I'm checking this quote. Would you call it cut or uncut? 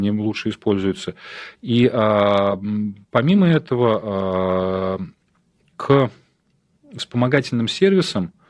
uncut